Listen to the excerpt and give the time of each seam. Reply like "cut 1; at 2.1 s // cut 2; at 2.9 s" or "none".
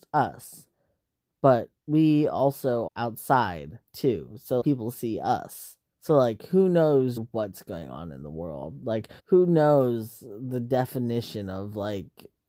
cut 1; at 1.8 s // cut 2; at 2.9 s // cut 3; at 3.9 s // cut 4; at 4.6 s // cut 5; at 5.9 s // cut 6; at 7.2 s // cut 7; at 9.2 s